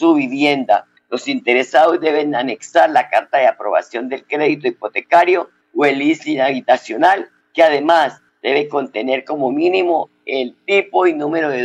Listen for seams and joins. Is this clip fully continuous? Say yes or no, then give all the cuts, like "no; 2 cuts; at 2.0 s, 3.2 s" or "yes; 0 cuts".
yes; 0 cuts